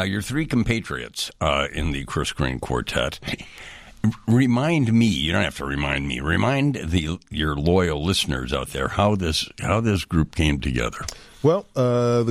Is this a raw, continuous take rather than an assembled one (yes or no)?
yes